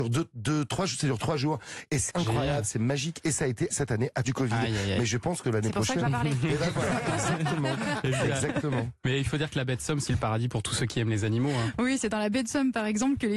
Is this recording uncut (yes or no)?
no